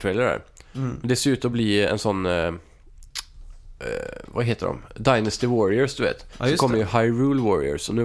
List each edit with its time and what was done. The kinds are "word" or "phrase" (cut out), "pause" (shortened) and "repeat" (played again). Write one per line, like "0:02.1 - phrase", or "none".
none

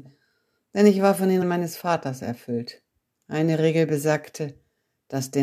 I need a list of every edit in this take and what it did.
0:01.4 - word
0:03.1 - pause

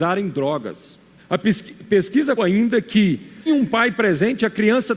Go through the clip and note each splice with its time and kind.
0:01.2 - pause
0:02.4 - word
0:03.5 - word

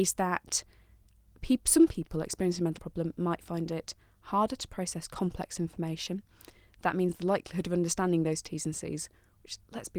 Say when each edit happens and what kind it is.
0:02.8 - word

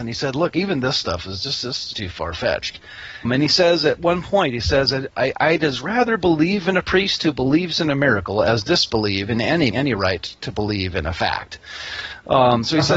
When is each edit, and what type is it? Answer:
0:01.9 - word
0:03.2 - word
0:09.7 - phrase

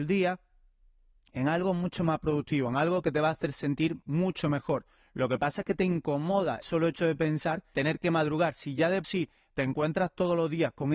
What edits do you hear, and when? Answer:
0:06.6 - word
0:07.7 - word
0:09.0 - word

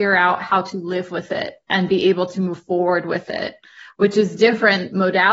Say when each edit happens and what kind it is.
none

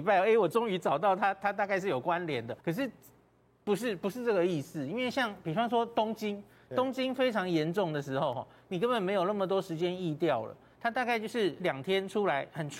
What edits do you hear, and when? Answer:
0:02.6 - pause
0:11.6 - word

